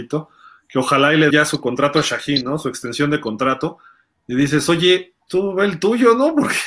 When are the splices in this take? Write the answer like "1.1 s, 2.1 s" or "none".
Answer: 1.3 s, 5.3 s